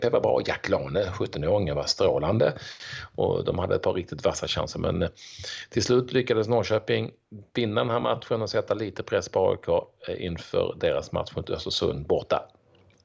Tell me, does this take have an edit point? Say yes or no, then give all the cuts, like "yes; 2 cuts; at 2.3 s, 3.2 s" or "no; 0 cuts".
no; 0 cuts